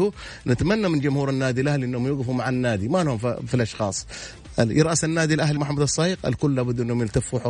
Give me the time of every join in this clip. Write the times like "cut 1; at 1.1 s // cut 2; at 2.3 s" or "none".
cut 1; at 5.6 s